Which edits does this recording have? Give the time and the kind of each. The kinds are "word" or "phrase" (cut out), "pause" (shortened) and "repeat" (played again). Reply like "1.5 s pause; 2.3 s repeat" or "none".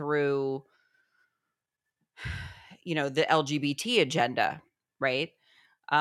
none

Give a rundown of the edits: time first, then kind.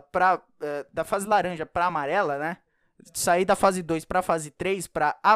none

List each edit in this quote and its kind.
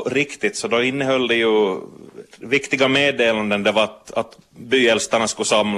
none

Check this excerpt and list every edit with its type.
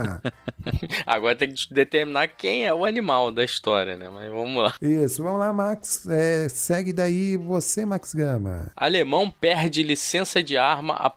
none

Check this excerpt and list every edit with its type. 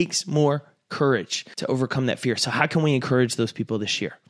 none

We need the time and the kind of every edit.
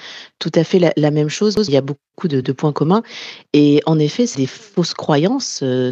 1.7 s word; 2.1 s pause; 2.4 s word; 4.3 s word

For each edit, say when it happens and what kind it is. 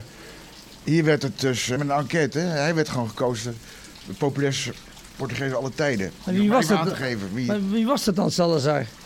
1.8 s word

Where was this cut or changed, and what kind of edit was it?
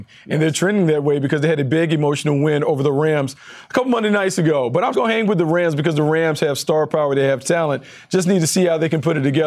4.9 s word

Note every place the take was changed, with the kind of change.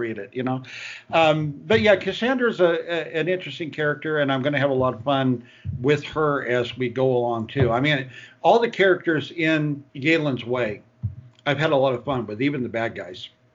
9.9 s pause

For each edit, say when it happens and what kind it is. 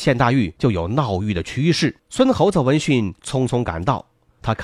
2.0 s pause

